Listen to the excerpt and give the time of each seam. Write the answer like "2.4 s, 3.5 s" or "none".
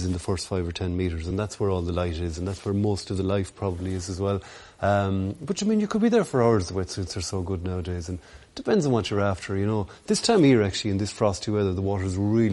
none